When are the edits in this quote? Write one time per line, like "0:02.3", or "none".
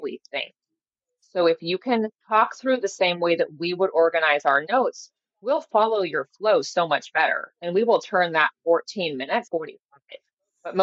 0:02.2
0:09.5